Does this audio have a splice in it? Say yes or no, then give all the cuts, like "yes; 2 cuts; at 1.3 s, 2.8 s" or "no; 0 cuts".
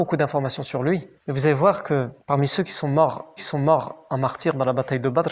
yes; 3 cuts; at 1.2 s, 2.2 s, 3.4 s